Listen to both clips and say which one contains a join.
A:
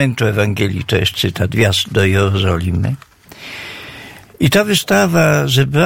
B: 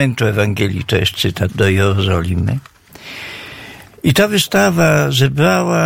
B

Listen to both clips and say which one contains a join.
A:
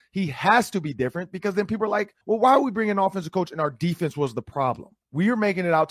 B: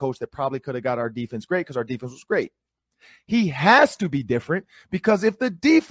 A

